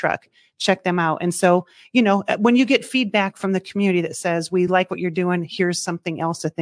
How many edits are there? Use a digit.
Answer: 0